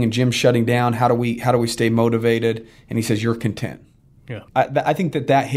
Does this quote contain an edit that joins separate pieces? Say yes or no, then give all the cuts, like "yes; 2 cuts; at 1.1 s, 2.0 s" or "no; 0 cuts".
yes; 1 cut; at 4.5 s